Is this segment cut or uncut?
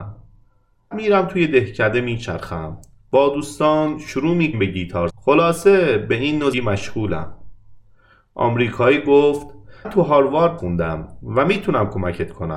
cut